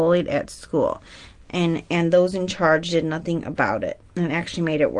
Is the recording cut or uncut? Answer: uncut